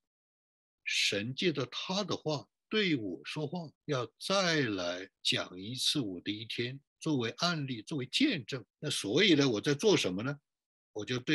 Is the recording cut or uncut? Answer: cut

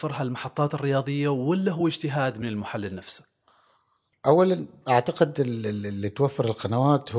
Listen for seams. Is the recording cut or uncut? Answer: uncut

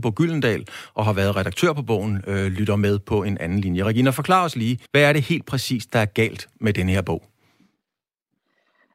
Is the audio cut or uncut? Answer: cut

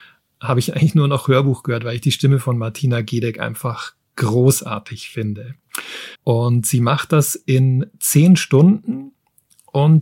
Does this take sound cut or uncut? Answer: cut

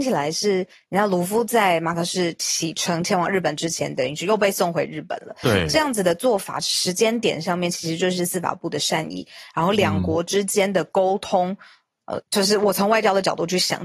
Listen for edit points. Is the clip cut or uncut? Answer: cut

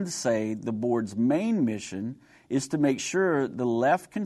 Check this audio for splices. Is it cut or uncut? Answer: uncut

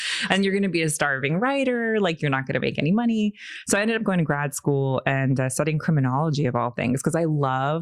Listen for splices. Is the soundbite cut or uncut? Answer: uncut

